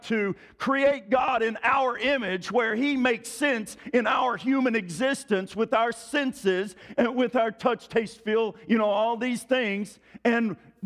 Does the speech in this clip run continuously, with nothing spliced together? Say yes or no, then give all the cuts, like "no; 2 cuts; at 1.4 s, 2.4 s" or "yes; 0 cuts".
yes; 0 cuts